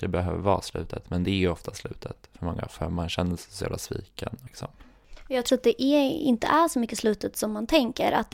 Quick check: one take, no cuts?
no; 2 cuts; at 4.5 s, 5.5 s

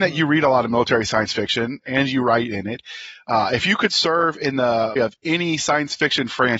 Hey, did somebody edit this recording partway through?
yes; 1 cut; at 5.0 s

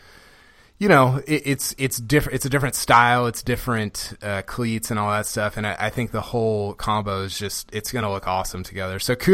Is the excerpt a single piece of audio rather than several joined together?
yes; 0 cuts

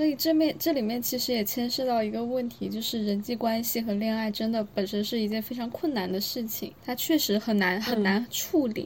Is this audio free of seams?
no; 1 cut; at 6.8 s

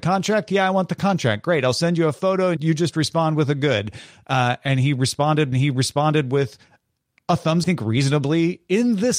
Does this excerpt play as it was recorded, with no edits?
no; 3 cuts; at 2.6 s, 5.5 s, 7.6 s

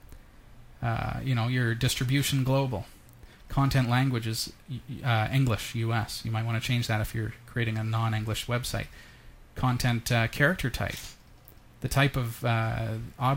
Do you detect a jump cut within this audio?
no; 0 cuts

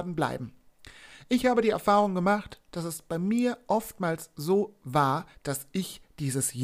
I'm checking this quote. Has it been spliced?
yes; 1 cut; at 5.3 s

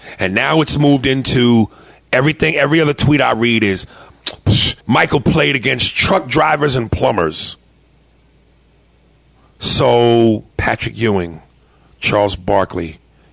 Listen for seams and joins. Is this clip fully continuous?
no; 2 cuts; at 4.8 s, 10.5 s

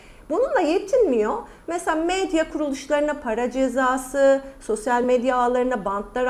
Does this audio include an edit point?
no; 0 cuts

